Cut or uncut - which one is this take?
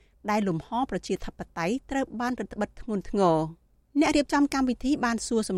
uncut